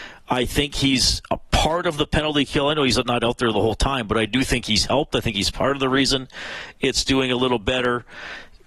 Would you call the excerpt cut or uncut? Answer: uncut